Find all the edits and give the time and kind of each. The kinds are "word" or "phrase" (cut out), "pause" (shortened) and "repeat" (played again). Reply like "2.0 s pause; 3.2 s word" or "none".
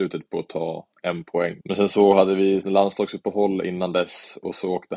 1.6 s pause